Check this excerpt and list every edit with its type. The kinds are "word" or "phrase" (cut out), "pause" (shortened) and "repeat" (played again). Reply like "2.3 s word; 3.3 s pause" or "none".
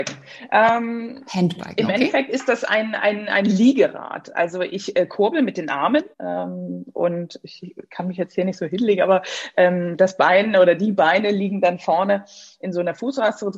6.1 s pause